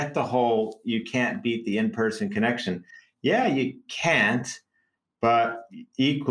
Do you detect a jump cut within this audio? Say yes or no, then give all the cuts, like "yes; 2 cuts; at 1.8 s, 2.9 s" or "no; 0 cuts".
no; 0 cuts